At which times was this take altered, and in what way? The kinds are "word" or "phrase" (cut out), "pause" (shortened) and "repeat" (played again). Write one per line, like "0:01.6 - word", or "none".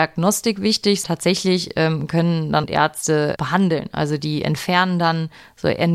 0:01.0 - word
0:02.6 - phrase

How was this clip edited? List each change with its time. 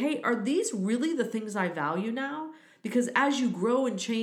none

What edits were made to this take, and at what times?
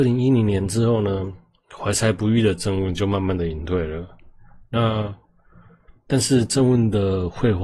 none

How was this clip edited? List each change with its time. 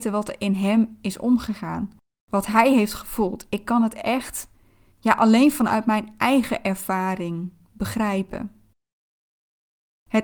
0:04.9 - word

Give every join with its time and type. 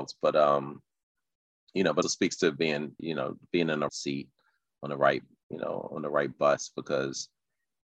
0:02.0 - word
0:03.0 - word
0:03.9 - word
0:05.4 - word

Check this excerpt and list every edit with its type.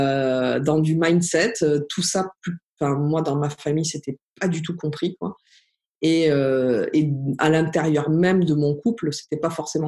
none

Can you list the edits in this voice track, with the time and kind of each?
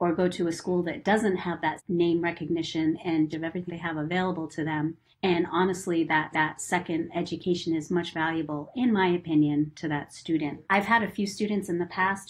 0:01.8 - word
0:03.3 - phrase
0:03.7 - word
0:05.1 - pause
0:06.3 - repeat
0:08.1 - word
0:10.6 - pause

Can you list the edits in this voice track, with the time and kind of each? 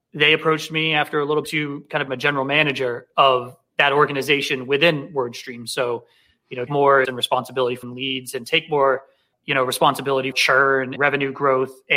0:01.4 - word
0:02.1 - word
0:06.7 - word
0:07.0 - word
0:07.8 - word
0:09.3 - word
0:10.3 - word
0:11.0 - word

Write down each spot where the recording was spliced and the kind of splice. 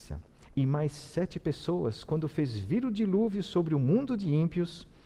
none

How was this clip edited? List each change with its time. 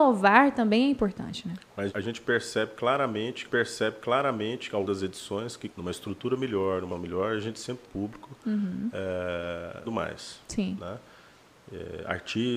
0:01.9 - word
0:03.4 - repeat
0:04.8 - word
0:05.7 - phrase
0:06.9 - word
0:07.8 - phrase
0:09.8 - phrase

